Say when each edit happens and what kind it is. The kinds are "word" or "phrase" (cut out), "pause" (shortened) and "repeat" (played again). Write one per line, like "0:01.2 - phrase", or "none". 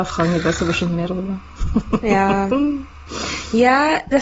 none